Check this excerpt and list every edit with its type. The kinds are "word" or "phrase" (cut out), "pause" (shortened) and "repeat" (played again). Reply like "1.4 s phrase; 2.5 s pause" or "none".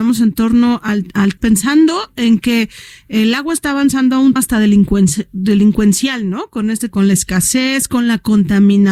1.4 s phrase; 4.4 s word; 6.9 s phrase